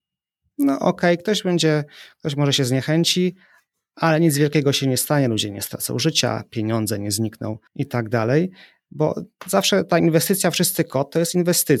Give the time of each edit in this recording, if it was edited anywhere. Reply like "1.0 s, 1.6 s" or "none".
7.7 s